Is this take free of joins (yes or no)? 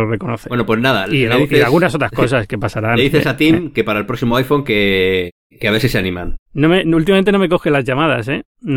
yes